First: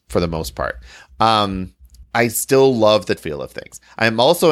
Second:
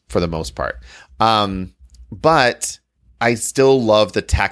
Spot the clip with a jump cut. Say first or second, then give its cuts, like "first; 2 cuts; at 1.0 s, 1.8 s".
first; 2 cuts; at 2.0 s, 3.2 s